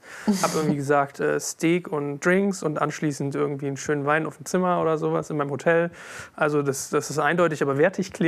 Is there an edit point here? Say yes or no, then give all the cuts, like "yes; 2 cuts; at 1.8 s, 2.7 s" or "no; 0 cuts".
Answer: no; 0 cuts